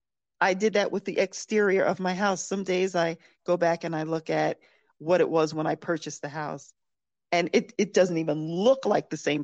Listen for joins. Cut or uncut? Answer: uncut